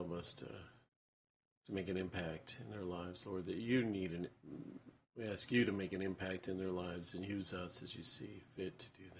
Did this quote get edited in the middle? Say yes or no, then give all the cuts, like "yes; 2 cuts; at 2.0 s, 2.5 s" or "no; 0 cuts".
no; 0 cuts